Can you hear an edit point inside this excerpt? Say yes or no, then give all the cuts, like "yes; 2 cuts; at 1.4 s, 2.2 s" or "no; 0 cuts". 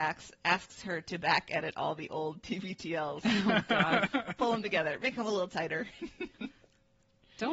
no; 0 cuts